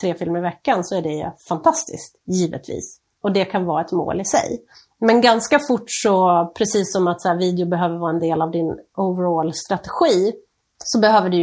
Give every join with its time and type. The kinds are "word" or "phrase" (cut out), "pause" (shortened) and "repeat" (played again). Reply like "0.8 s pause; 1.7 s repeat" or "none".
none